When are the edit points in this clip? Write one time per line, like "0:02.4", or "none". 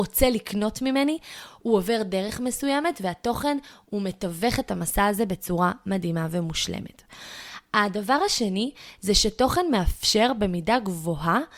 none